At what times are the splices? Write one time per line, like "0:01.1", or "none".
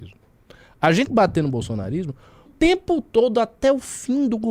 0:01.1
0:02.5